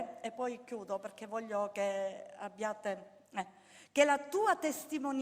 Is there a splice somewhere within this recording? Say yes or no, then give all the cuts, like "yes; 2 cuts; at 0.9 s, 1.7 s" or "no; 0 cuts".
no; 0 cuts